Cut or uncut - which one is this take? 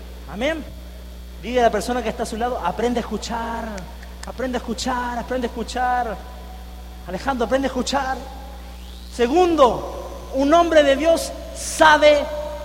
uncut